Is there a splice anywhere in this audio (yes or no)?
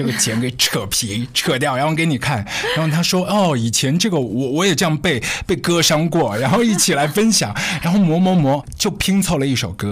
no